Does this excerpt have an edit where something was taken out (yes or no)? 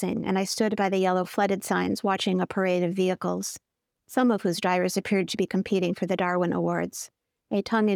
no